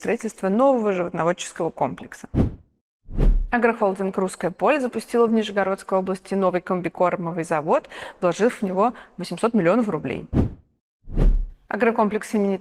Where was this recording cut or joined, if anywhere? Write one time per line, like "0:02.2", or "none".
none

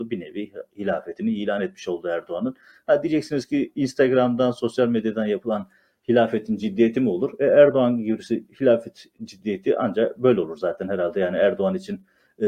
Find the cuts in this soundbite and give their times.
none

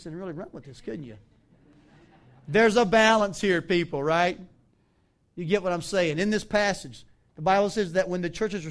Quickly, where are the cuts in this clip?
none

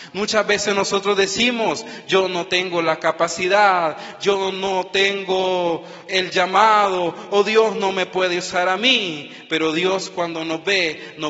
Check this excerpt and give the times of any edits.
0:06.1

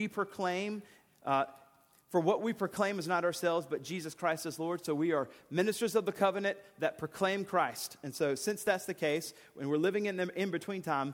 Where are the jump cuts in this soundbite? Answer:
none

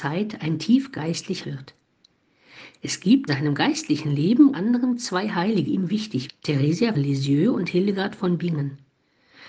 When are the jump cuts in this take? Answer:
0:01.4
0:03.3
0:04.5
0:05.7
0:06.3
0:06.9

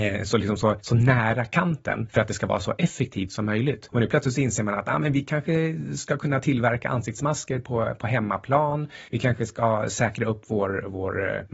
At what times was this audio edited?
none

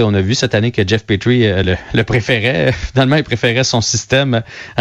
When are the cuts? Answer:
none

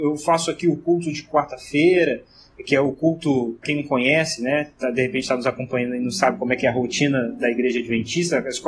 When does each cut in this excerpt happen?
0:03.6

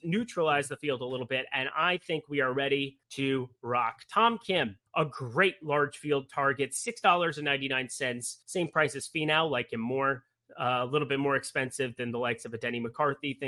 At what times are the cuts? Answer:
0:03.0
0:04.9
0:08.4

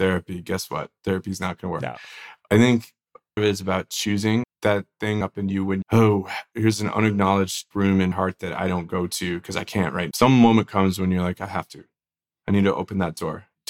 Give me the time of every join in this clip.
0:03.4
0:04.4
0:05.2
0:05.8
0:07.7
0:08.1
0:10.1

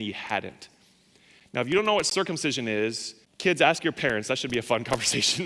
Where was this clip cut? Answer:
0:03.2

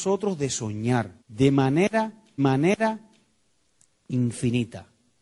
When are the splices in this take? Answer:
0:01.2
0:02.4

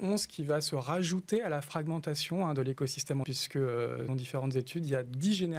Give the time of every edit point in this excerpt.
0:03.2
0:04.1

